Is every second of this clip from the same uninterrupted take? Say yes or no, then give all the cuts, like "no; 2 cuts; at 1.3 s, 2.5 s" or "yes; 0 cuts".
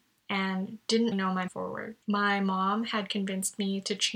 no; 3 cuts; at 1.1 s, 1.5 s, 2.0 s